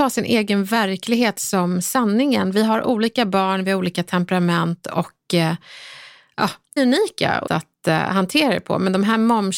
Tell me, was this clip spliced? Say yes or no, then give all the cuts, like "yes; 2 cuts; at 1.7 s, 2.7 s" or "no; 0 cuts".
yes; 2 cuts; at 6.8 s, 7.5 s